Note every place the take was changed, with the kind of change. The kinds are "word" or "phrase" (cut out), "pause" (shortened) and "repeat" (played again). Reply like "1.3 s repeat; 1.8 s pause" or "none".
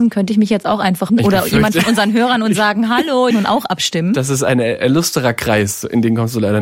1.1 s word; 3.3 s phrase